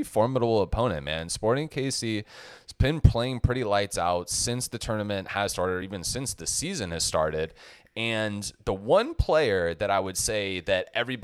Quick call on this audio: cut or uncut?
uncut